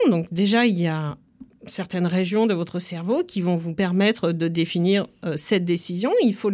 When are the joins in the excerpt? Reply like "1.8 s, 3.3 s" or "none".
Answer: none